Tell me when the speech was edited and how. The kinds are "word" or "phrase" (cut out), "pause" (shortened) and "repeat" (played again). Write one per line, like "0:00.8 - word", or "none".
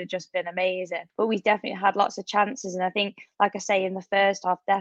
0:01.1 - pause